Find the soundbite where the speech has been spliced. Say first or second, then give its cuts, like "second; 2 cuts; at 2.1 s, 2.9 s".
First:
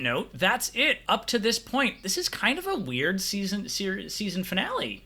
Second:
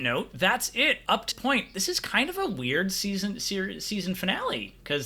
second; 1 cut; at 1.3 s